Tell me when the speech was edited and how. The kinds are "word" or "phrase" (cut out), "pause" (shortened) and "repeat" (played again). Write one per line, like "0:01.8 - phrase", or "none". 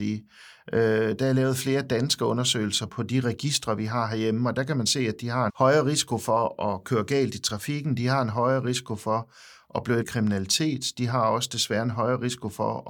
0:02.9 - word
0:05.5 - word
0:10.0 - word